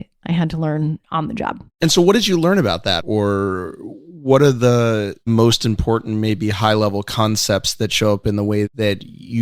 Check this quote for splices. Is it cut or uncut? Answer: cut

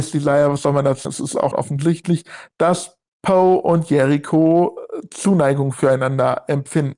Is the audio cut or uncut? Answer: cut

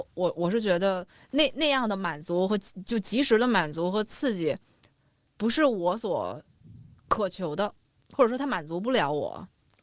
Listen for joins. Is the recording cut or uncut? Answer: uncut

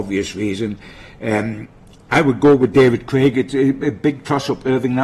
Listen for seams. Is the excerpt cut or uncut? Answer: uncut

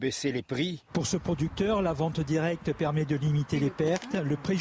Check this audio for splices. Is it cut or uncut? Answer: uncut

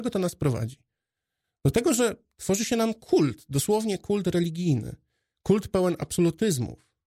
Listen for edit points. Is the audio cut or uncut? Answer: uncut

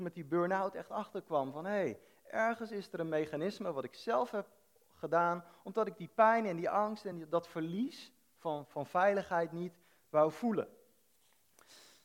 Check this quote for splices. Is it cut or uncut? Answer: uncut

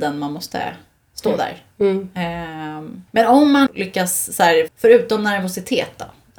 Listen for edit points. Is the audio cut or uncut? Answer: cut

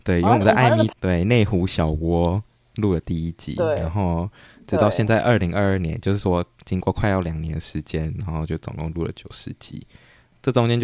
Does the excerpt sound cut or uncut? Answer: cut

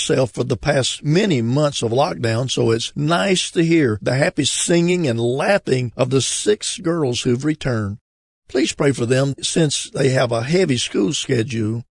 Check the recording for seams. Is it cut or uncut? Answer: uncut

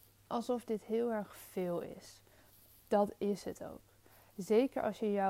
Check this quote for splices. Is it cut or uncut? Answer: uncut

